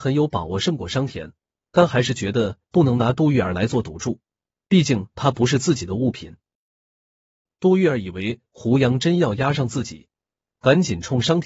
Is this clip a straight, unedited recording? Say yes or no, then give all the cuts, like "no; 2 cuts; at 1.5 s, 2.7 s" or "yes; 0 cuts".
yes; 0 cuts